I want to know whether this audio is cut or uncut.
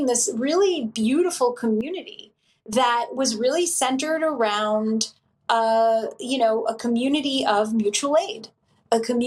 uncut